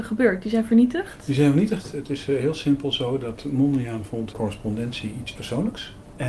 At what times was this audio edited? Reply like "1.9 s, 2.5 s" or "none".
4.3 s